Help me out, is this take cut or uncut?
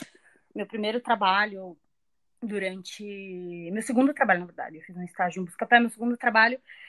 uncut